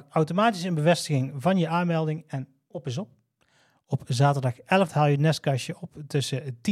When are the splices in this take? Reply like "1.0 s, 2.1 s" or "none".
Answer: 4.9 s